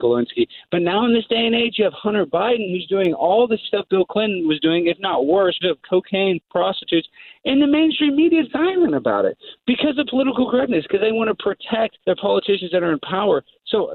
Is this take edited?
yes; 4 cuts; at 3.6 s, 5.6 s, 8.5 s, 12.0 s

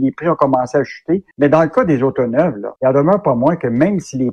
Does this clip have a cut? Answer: yes; 2 cuts; at 1.3 s, 2.8 s

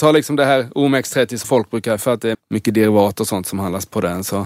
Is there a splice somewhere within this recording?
yes; 3 cuts; at 1.4 s, 2.0 s, 2.3 s

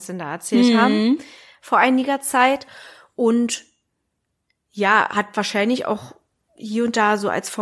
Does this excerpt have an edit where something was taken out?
no; 0 cuts

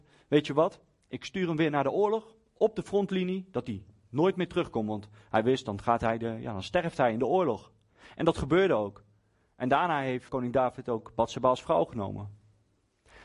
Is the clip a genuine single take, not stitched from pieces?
no; 1 cut; at 10.3 s

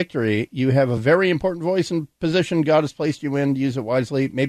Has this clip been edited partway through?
no; 0 cuts

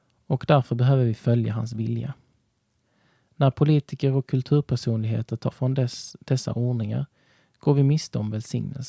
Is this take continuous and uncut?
no; 1 cut; at 5.5 s

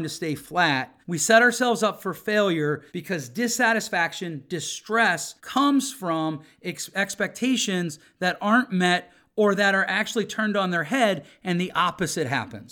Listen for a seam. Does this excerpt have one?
yes; 3 cuts; at 1.0 s, 2.9 s, 5.4 s

